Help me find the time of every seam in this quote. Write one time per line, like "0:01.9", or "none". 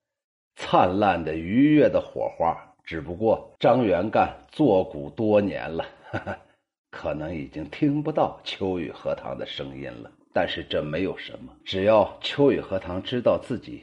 0:03.6
0:10.2
0:11.6